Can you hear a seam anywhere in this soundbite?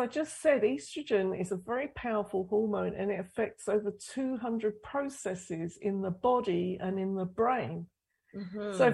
no; 0 cuts

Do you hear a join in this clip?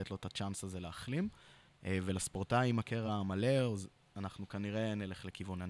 no; 0 cuts

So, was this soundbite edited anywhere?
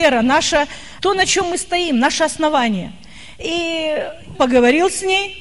yes; 2 cuts; at 1.0 s, 4.3 s

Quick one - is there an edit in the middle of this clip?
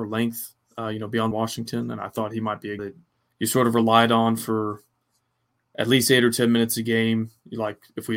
yes; 3 cuts; at 1.3 s, 2.8 s, 3.1 s

